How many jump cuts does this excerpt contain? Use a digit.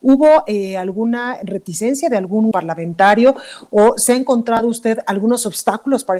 1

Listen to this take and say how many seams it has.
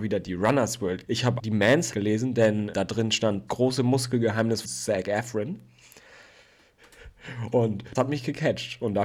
7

